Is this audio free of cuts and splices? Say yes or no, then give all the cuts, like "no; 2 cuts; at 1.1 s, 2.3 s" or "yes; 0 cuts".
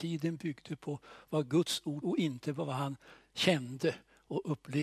no; 1 cut; at 2.0 s